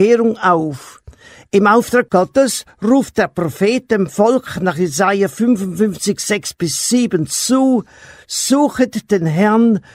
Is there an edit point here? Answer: no; 0 cuts

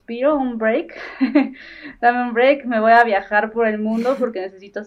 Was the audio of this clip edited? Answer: no; 0 cuts

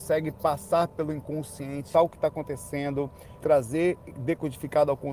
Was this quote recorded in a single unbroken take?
no; 2 cuts; at 1.9 s, 3.4 s

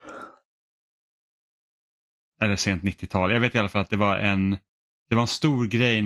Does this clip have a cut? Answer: no; 0 cuts

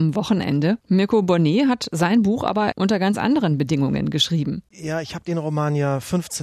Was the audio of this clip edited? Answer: no; 0 cuts

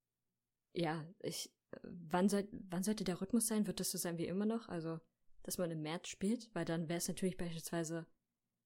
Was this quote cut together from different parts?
no; 0 cuts

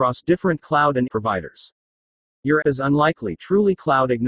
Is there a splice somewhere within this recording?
yes; 3 cuts; at 1.1 s, 2.6 s, 3.4 s

